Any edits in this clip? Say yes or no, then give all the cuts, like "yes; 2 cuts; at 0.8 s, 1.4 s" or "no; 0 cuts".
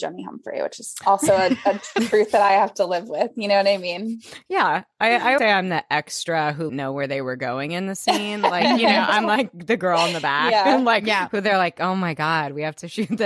yes; 2 cuts; at 5.4 s, 6.7 s